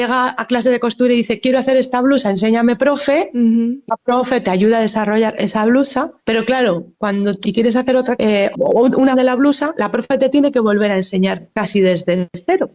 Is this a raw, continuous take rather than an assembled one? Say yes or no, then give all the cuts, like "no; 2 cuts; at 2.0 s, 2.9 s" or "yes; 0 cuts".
no; 6 cuts; at 3.9 s, 6.2 s, 7.4 s, 8.2 s, 8.5 s, 9.1 s